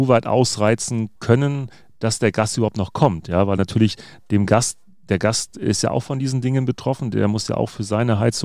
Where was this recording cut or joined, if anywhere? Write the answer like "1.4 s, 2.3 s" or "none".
none